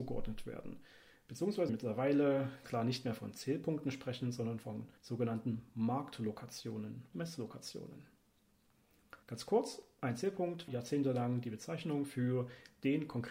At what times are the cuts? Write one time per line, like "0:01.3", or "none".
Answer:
0:01.7
0:02.6
0:05.0
0:07.1
0:09.2
0:10.7

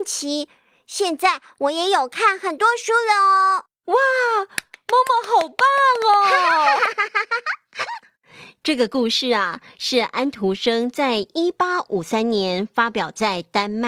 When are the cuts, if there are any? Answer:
0:03.7

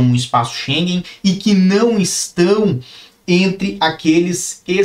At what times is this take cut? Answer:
none

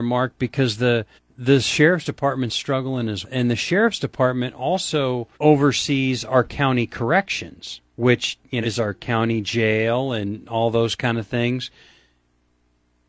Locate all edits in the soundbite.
0:01.2
0:03.2
0:05.3
0:07.9
0:08.6

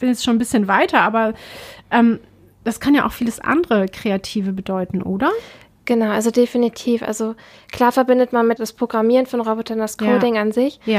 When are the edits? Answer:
0:08.6

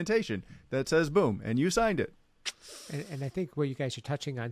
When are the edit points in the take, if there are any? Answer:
none

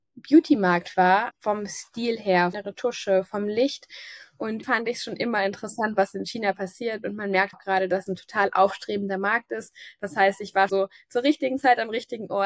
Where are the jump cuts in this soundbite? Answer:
0:00.9
0:01.3
0:02.5
0:04.6
0:07.5
0:08.1
0:10.7

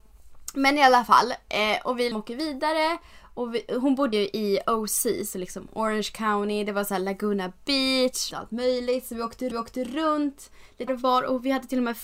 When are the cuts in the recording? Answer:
0:02.1
0:04.1
0:08.3
0:09.5
0:10.9

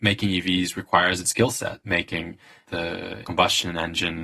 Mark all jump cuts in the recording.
0:01.2
0:01.8
0:03.2

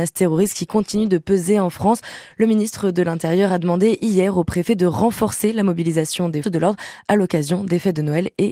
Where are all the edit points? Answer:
0:06.4

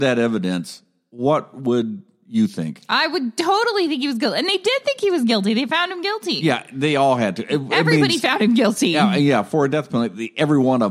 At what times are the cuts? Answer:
none

